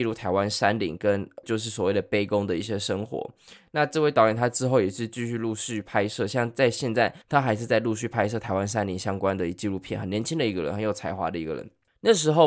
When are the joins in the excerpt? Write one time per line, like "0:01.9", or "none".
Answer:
0:01.4
0:07.2